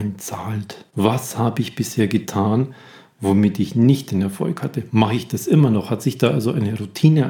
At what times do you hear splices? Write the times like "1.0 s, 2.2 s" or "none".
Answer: none